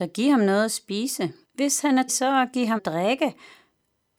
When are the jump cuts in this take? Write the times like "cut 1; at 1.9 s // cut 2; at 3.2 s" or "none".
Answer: cut 1; at 1.4 s // cut 2; at 2.1 s // cut 3; at 2.8 s